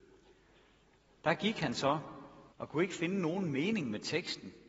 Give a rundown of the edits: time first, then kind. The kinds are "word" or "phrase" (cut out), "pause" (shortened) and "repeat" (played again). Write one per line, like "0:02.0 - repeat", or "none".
0:02.5 - pause